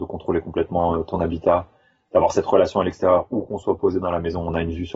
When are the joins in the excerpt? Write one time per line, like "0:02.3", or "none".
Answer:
none